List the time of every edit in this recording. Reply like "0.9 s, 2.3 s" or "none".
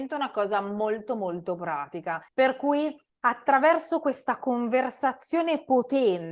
2.3 s, 3.1 s